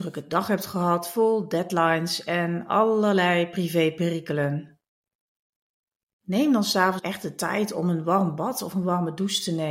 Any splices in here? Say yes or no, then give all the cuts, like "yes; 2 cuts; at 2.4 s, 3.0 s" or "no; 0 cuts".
yes; 1 cut; at 7.0 s